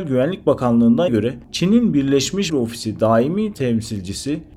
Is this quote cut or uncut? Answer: cut